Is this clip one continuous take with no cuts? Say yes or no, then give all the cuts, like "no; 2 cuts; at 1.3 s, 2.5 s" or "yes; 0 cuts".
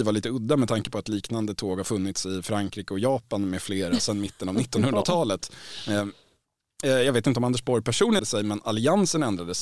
no; 2 cuts; at 6.8 s, 8.2 s